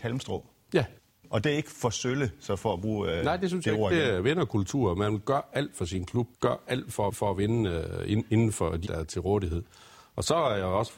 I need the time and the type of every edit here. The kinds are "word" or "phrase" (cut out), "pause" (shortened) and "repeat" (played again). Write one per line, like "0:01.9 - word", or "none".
0:01.0 - pause
0:06.3 - pause
0:07.1 - repeat
0:08.9 - word